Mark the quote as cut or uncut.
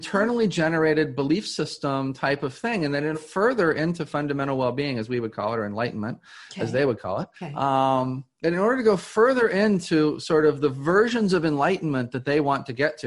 cut